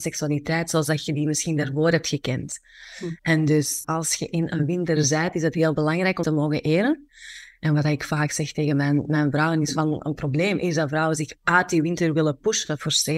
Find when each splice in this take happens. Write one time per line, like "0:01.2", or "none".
0:03.2
0:03.8
0:06.2